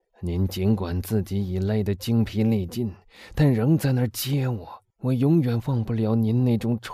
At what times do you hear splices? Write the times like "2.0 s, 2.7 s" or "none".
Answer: 4.9 s

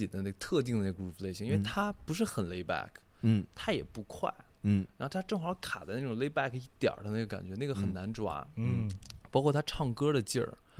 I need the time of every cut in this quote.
none

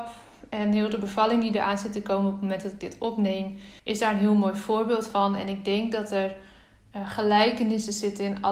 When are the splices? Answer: 3.8 s

